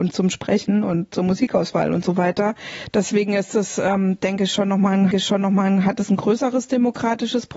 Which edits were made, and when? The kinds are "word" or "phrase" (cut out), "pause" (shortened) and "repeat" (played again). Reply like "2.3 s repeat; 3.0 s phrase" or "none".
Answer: 5.1 s repeat

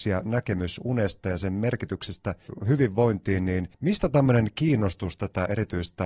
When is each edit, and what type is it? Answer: 3.7 s pause

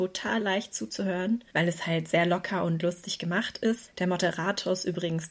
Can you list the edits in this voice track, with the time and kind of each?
1.5 s pause

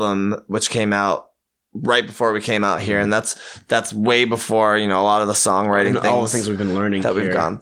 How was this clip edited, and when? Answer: none

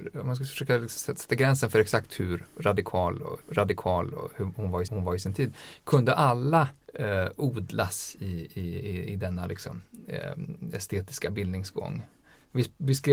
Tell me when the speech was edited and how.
3.4 s repeat; 4.9 s repeat; 6.8 s pause

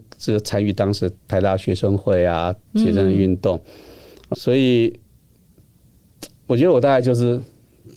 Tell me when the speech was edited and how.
1.2 s pause; 4.3 s word

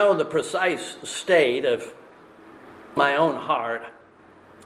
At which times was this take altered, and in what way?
3.0 s word

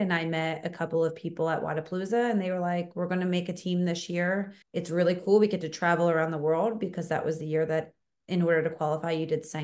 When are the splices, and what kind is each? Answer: 4.6 s pause

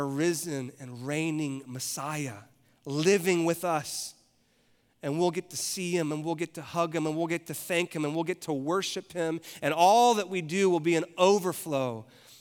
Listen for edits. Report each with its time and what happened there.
none

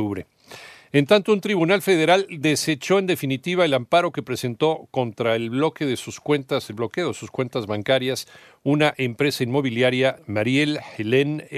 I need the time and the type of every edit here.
10.2 s word

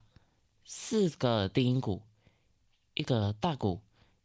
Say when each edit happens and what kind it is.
none

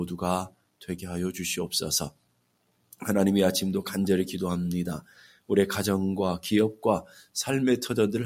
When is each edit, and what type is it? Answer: none

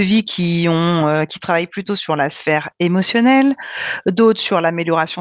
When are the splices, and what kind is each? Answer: none

